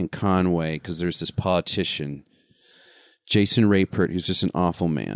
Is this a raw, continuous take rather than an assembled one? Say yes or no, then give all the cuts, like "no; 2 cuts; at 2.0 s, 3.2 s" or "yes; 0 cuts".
yes; 0 cuts